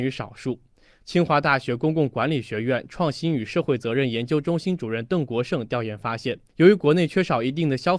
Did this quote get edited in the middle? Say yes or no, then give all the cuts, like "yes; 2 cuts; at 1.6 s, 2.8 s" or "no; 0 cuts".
yes; 1 cut; at 6.5 s